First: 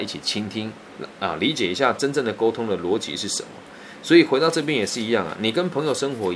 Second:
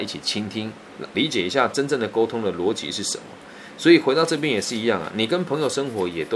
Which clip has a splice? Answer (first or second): second